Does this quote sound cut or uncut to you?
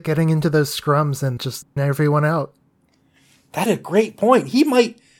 cut